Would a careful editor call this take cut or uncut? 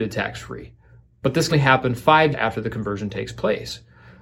cut